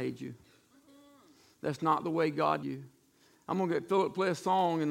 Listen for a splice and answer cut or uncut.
cut